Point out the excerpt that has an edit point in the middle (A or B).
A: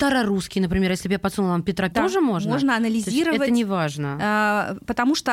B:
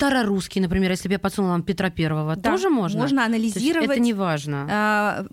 A